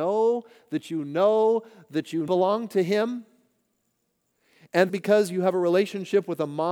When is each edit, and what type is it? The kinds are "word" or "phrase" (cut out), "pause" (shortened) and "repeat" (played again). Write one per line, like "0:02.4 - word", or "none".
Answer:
0:02.3 - phrase
0:04.9 - phrase